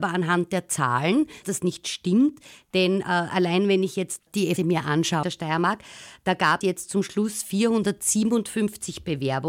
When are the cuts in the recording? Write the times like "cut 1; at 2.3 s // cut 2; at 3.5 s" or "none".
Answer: cut 1; at 1.4 s // cut 2; at 4.2 s // cut 3; at 4.6 s // cut 4; at 5.2 s // cut 5; at 6.6 s